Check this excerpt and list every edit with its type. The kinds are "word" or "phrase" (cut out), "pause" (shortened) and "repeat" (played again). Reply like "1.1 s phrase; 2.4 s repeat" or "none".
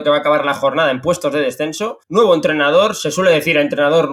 2.0 s pause